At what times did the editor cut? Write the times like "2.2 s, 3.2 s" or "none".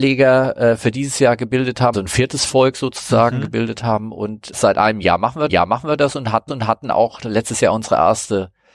1.9 s, 4.5 s, 5.5 s, 6.5 s